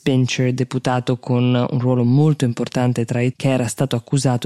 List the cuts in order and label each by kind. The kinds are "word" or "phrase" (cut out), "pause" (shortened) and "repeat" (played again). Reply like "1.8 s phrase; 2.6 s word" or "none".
3.3 s word